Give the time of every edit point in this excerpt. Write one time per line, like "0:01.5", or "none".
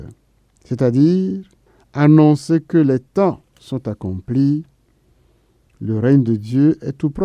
0:03.5